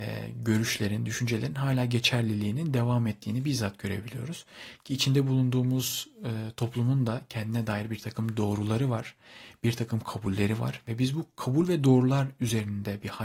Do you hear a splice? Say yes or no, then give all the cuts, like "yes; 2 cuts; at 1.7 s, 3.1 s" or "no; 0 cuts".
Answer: no; 0 cuts